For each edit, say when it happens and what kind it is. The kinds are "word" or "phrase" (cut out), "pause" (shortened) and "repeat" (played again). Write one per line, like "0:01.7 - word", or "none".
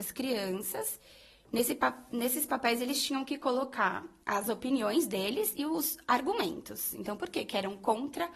none